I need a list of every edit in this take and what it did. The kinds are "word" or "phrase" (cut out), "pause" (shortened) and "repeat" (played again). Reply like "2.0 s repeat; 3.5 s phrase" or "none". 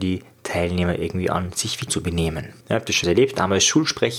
1.9 s word; 2.6 s pause; 3.0 s word